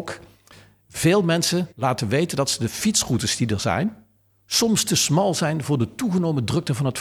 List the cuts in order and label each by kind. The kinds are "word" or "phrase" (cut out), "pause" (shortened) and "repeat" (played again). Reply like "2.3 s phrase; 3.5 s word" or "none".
1.7 s pause; 4.2 s pause